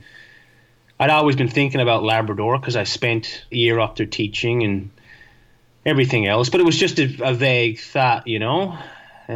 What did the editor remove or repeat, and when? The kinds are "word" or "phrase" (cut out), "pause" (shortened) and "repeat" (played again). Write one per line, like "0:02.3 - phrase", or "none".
0:03.5 - word